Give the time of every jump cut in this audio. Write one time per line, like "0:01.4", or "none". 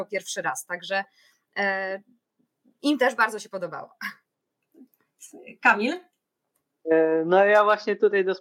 none